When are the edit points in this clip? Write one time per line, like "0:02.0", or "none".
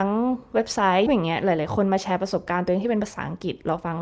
0:01.1